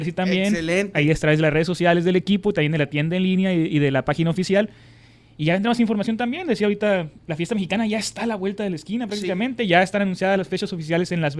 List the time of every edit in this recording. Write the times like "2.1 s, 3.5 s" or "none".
none